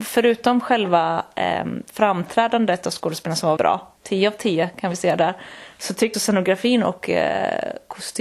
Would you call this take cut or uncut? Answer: cut